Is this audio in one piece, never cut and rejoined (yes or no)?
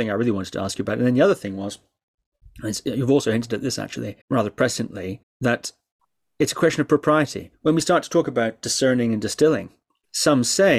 no